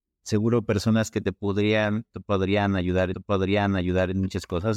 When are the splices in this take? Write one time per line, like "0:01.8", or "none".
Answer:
0:03.1